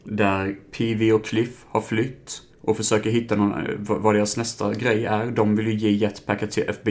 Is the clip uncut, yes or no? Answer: no